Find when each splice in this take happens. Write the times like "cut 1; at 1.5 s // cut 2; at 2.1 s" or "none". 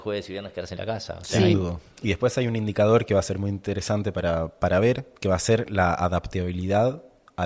none